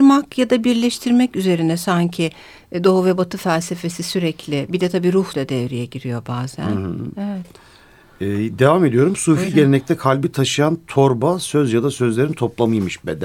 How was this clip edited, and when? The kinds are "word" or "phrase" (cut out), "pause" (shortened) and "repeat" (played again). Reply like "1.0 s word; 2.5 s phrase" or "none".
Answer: 5.3 s word